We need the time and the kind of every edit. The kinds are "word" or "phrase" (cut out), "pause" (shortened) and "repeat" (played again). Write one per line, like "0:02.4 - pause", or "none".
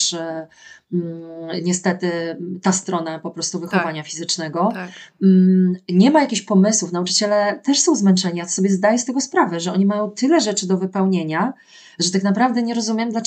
none